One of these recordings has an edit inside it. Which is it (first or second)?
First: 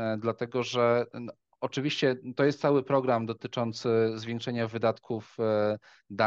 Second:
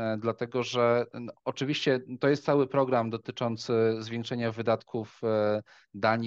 second